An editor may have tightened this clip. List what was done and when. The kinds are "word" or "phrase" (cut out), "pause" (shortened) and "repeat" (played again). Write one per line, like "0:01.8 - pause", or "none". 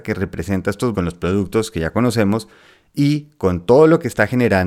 0:00.9 - word